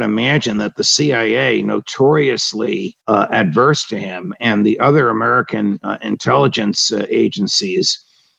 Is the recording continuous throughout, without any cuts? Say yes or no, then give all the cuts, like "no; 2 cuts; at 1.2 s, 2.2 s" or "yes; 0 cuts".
no; 1 cut; at 3.0 s